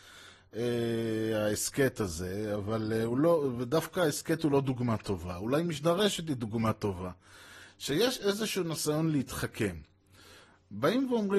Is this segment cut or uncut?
uncut